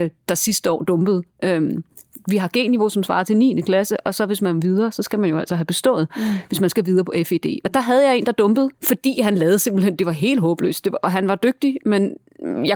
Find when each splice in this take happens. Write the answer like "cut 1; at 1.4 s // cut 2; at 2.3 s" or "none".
cut 1; at 8.7 s